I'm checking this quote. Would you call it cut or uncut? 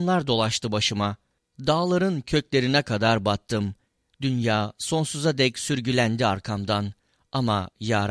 uncut